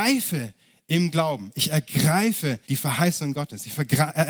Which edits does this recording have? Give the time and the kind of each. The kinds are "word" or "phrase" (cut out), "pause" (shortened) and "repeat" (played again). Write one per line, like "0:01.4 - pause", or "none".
0:02.6 - pause